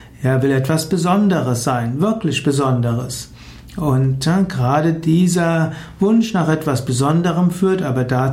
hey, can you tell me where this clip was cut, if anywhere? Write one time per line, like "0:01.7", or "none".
none